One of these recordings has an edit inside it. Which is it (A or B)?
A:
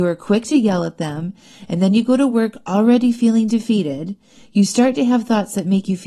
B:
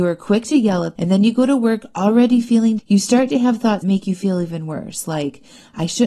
B